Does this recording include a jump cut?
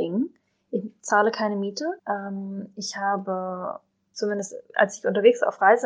yes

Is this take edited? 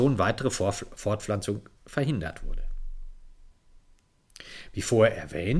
yes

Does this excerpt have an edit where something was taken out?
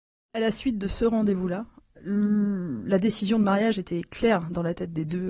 no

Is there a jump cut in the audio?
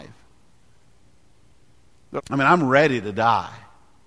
yes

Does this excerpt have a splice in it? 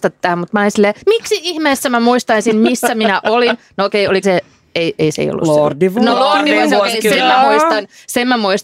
yes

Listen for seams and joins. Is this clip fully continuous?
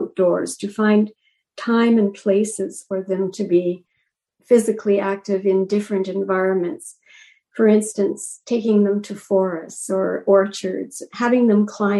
yes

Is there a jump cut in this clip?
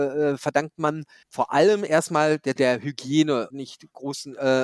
yes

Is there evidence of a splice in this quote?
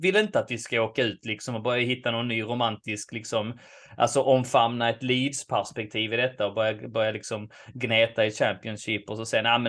no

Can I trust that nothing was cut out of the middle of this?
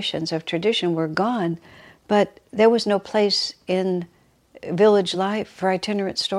yes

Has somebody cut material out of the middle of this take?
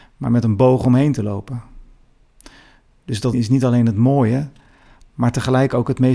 yes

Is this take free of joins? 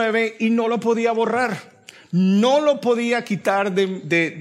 yes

